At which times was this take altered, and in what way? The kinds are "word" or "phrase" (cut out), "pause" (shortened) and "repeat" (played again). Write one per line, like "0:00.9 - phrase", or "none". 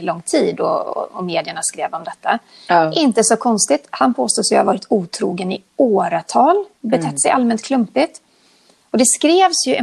none